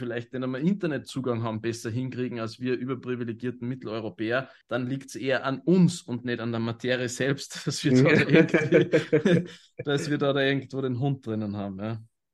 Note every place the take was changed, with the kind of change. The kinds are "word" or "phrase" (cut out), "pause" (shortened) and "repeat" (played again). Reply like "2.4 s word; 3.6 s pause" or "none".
4.6 s pause